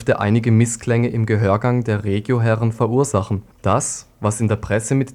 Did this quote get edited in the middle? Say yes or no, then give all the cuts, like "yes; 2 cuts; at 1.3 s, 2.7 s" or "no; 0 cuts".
yes; 1 cut; at 3.5 s